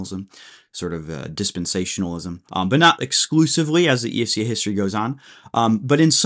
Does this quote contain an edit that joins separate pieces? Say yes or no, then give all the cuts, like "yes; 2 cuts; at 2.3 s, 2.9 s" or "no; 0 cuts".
yes; 1 cut; at 2.5 s